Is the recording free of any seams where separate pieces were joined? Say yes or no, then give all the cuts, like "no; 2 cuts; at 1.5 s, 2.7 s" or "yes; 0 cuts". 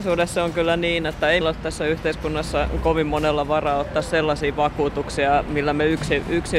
no; 1 cut; at 1.4 s